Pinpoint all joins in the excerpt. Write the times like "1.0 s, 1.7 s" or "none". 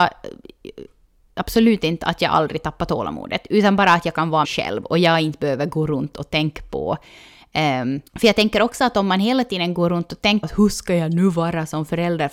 4.4 s, 8.1 s, 10.4 s